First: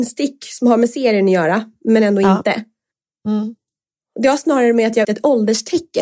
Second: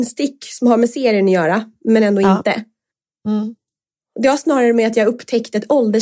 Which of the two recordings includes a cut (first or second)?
first